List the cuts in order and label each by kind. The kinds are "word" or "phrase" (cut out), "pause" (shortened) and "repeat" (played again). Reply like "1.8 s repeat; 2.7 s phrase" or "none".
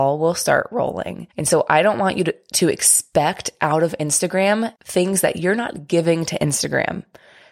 1.3 s pause; 4.8 s pause